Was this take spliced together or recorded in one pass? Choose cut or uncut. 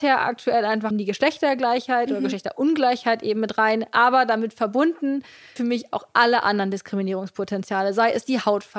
cut